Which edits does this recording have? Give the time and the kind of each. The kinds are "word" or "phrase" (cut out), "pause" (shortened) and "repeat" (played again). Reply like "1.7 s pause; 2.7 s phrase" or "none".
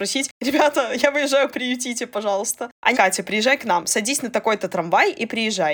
1.5 s word; 2.9 s phrase